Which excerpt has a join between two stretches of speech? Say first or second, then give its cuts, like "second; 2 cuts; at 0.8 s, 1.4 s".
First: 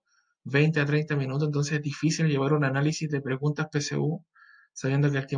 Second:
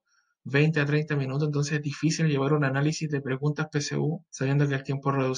second; 1 cut; at 4.3 s